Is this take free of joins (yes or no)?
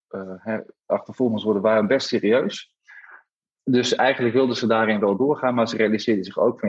yes